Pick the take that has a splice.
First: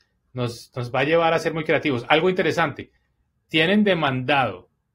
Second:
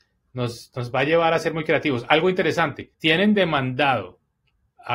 second; 1 cut; at 2.9 s

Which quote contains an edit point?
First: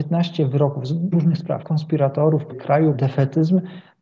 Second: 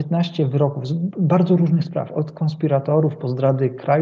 first; 4 cuts; at 1.1 s, 1.6 s, 2.5 s, 2.9 s

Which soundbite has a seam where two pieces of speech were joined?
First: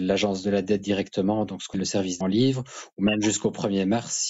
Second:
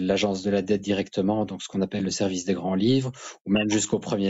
first; 2 cuts; at 1.7 s, 2.2 s

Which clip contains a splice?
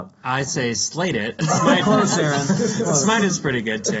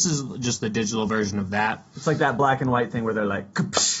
first; 2 cuts; at 1.4 s, 1.8 s

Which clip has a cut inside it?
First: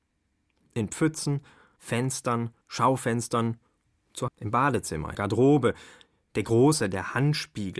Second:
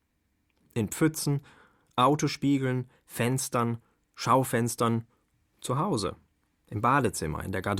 first; 4 cuts; at 1.8 s, 2.6 s, 4.3 s, 5.1 s

